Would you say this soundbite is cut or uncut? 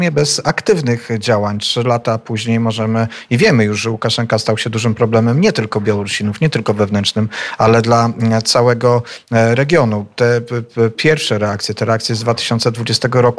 uncut